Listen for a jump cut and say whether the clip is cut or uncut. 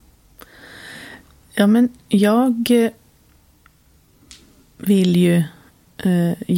uncut